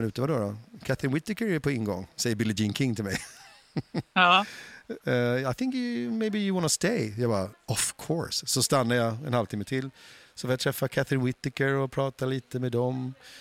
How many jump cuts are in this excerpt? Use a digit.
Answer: 0